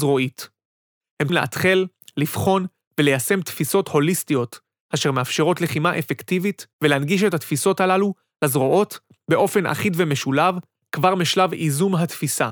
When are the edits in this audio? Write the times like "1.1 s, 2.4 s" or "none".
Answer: 1.3 s, 6.7 s